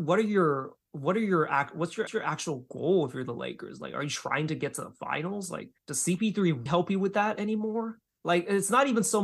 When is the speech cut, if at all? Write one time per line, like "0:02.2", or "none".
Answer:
0:02.1
0:05.8
0:06.7
0:08.0